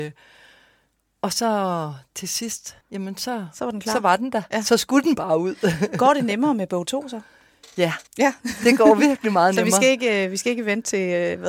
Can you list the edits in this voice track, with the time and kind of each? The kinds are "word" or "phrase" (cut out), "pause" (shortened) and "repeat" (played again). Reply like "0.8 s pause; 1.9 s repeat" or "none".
2.8 s pause; 8.1 s pause